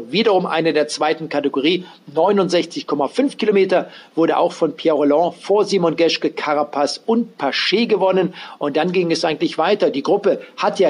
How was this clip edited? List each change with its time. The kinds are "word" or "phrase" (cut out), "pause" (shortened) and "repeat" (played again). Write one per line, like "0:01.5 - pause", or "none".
none